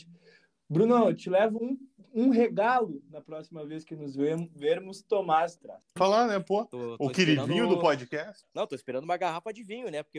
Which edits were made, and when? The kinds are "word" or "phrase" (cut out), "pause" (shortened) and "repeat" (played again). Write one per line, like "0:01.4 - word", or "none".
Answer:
0:01.6 - word
0:05.6 - phrase
0:06.0 - phrase